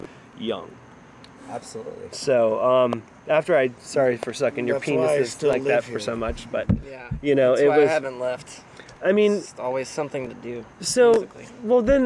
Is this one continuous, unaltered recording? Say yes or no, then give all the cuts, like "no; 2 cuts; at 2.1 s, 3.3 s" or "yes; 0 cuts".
no; 1 cut; at 10.7 s